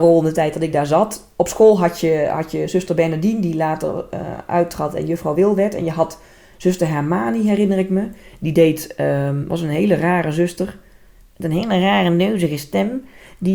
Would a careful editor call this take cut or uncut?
uncut